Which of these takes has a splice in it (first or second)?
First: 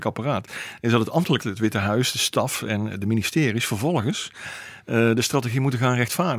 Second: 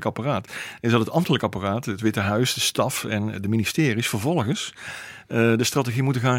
first